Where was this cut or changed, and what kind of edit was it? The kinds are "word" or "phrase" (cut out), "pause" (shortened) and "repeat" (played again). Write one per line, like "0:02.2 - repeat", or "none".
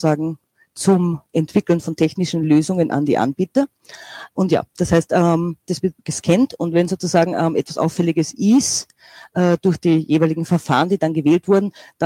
0:06.0 - pause